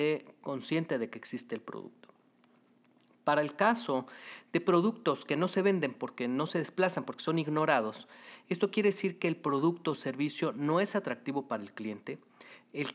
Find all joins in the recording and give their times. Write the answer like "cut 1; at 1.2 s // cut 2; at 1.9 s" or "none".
none